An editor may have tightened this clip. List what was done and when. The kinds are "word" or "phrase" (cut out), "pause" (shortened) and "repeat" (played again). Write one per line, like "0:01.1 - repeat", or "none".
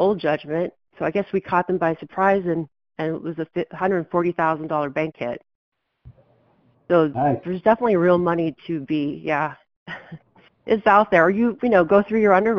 none